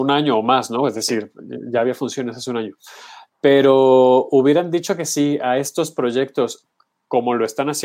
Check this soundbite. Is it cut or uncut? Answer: cut